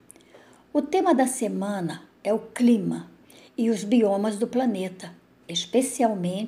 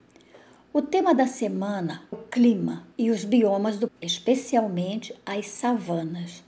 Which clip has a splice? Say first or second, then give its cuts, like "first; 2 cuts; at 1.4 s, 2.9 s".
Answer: second; 3 cuts; at 2.1 s, 2.9 s, 3.9 s